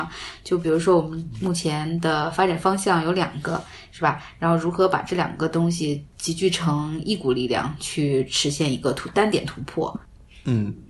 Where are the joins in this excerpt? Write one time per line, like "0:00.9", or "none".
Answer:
0:06.1